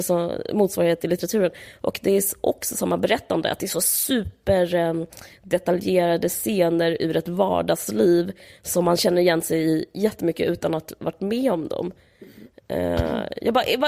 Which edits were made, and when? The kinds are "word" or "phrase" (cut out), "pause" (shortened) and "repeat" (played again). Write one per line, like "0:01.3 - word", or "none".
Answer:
none